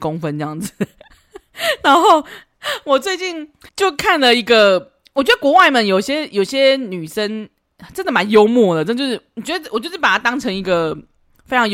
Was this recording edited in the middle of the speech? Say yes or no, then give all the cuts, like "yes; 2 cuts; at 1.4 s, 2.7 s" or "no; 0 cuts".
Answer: yes; 1 cut; at 3.7 s